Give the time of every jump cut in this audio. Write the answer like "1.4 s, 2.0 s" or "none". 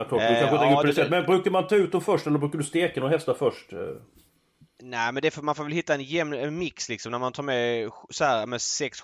none